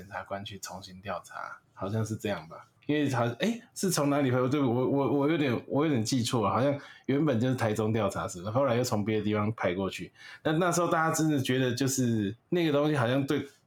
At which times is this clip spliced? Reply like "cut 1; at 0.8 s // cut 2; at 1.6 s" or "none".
cut 1; at 1.6 s // cut 2; at 2.8 s // cut 3; at 12.4 s